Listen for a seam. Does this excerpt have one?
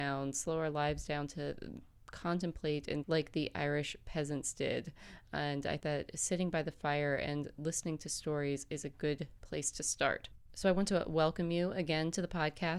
yes; 2 cuts; at 3.0 s, 5.8 s

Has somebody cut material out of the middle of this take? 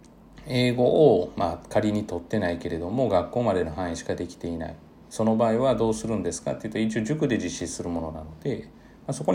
no; 0 cuts

